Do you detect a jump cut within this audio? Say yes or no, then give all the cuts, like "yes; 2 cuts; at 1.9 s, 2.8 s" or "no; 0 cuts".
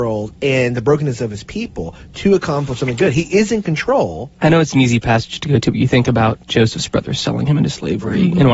yes; 1 cut; at 4.3 s